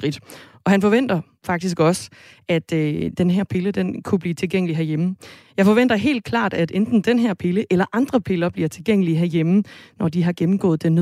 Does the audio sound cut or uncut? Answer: uncut